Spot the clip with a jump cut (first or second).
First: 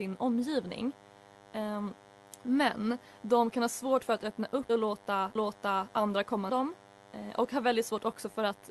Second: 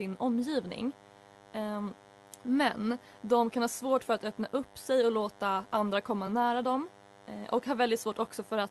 first